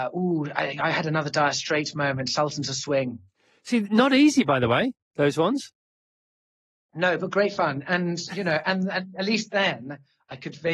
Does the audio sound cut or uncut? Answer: uncut